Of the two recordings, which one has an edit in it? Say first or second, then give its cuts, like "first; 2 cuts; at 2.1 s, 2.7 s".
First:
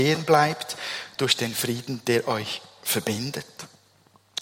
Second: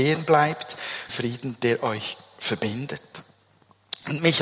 second; 1 cut; at 1.1 s